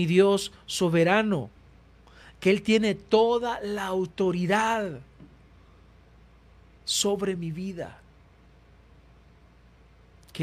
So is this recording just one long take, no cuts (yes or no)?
yes